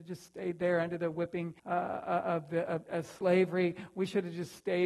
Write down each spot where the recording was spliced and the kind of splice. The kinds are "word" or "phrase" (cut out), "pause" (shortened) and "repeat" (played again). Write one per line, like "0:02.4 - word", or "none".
0:01.6 - pause